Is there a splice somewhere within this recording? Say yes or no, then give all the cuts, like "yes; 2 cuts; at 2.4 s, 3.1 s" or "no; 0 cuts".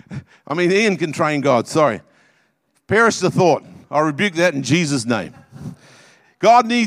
no; 0 cuts